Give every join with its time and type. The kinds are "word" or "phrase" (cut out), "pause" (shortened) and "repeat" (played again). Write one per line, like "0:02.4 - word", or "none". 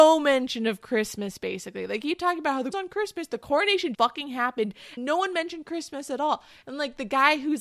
0:02.7 - word
0:03.9 - word
0:05.0 - word